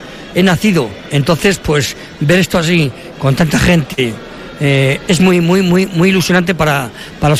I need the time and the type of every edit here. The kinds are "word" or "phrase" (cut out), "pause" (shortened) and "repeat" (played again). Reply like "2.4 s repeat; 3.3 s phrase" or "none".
none